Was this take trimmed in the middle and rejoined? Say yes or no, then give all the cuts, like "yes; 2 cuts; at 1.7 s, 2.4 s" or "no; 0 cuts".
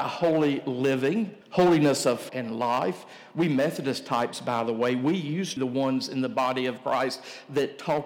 yes; 3 cuts; at 1.4 s, 2.3 s, 5.6 s